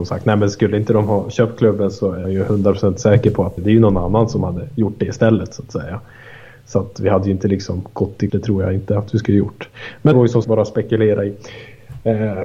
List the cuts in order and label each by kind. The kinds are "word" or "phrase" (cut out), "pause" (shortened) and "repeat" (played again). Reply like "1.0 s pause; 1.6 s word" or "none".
2.2 s word; 3.6 s word; 8.3 s word; 10.1 s word; 10.4 s word